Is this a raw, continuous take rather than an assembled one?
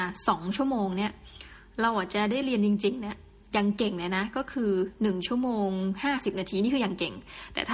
yes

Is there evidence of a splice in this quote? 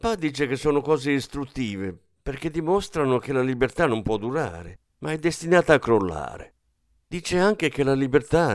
no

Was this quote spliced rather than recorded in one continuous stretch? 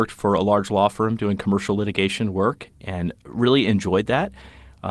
no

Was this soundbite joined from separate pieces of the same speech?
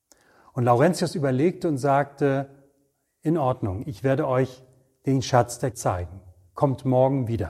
yes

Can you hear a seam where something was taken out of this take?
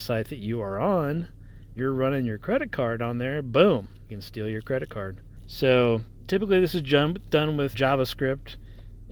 yes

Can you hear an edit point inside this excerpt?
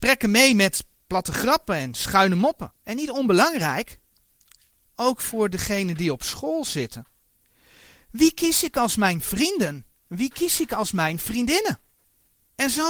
yes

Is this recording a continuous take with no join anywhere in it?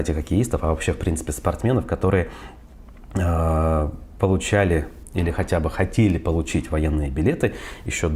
yes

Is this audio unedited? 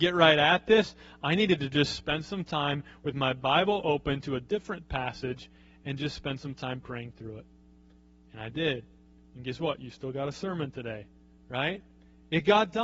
yes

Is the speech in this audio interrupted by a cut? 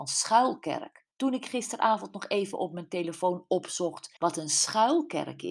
yes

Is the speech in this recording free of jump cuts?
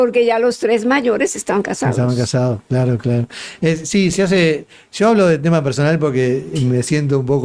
yes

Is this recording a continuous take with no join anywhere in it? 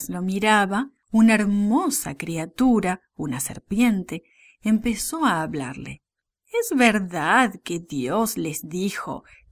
yes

